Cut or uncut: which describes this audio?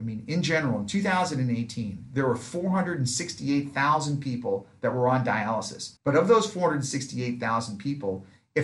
cut